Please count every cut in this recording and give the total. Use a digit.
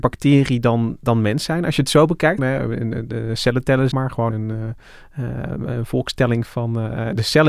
3